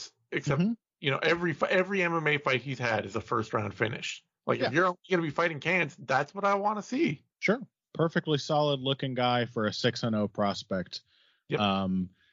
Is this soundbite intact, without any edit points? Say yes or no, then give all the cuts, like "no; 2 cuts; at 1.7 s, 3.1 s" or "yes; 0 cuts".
no; 1 cut; at 7.3 s